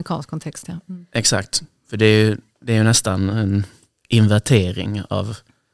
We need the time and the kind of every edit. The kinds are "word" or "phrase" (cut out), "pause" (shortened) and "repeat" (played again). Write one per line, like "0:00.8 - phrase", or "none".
none